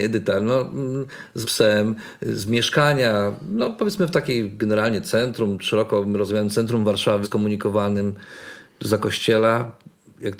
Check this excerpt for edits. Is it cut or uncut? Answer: cut